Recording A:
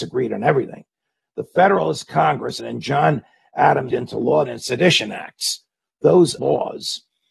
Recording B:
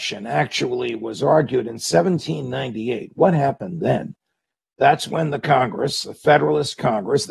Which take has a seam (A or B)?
A